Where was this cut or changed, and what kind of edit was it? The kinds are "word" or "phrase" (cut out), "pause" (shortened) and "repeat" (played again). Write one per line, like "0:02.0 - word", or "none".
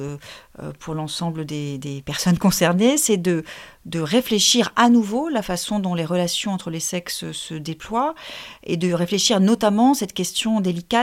none